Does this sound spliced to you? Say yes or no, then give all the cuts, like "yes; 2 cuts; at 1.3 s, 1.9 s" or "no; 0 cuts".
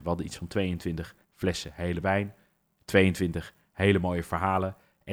yes; 2 cuts; at 1.2 s, 2.0 s